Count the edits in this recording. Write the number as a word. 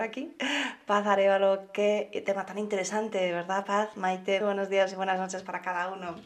one